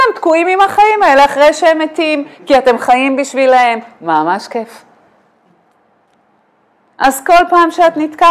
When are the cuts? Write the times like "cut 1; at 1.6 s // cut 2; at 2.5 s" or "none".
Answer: none